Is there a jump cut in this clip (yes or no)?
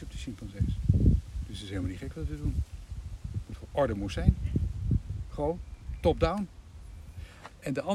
no